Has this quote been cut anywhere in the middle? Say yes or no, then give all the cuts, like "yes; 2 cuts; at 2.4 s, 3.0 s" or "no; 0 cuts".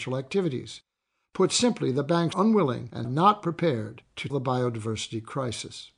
yes; 3 cuts; at 2.3 s, 3.0 s, 4.3 s